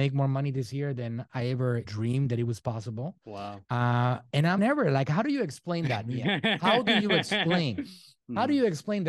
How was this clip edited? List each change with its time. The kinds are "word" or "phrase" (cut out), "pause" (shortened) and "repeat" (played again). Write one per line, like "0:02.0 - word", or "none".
0:01.8 - word
0:03.6 - pause
0:04.6 - phrase